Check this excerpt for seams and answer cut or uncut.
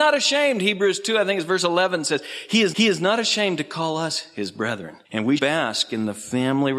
cut